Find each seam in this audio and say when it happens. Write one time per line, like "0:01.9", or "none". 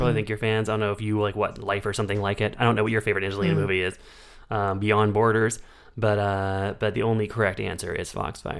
none